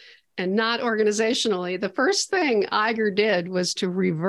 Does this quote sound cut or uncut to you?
uncut